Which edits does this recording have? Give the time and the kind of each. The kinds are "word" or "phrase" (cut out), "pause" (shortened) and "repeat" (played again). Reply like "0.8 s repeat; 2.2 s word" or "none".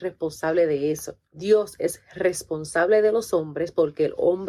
1.3 s pause